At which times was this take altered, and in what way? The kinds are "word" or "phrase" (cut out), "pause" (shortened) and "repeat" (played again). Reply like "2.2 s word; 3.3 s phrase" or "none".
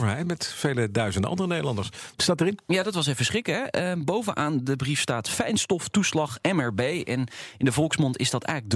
none